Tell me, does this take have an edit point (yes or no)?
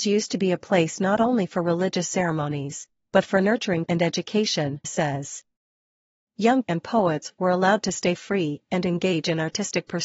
yes